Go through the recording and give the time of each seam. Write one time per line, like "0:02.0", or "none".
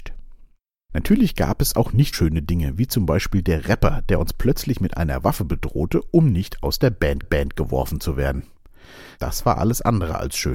0:02.1
0:07.2